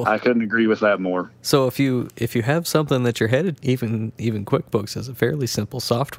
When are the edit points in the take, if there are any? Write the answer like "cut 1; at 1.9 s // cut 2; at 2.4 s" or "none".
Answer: cut 1; at 3.6 s